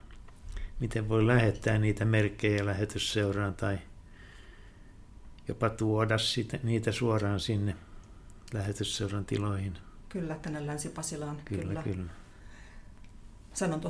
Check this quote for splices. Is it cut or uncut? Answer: uncut